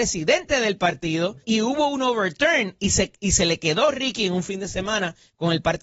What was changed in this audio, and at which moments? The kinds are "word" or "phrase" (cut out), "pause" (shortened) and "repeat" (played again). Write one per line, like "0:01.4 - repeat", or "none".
0:01.4 - pause